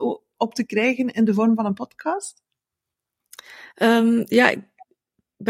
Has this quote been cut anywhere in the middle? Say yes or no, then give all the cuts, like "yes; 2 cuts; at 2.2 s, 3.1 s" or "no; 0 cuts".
no; 0 cuts